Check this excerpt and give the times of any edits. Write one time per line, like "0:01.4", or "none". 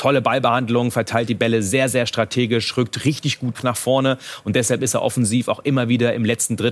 0:03.5